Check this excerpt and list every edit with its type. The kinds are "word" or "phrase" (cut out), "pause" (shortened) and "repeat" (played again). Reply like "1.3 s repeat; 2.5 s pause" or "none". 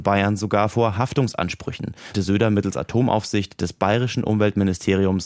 2.1 s word